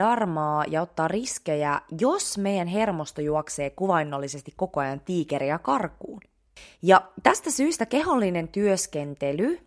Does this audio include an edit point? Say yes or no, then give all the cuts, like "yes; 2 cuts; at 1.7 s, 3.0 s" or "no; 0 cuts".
no; 0 cuts